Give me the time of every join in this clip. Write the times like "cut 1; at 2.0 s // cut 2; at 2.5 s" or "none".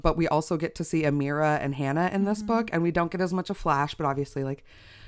none